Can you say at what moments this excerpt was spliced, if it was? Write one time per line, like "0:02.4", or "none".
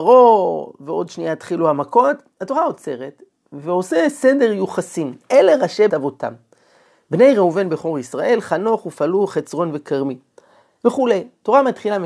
0:05.9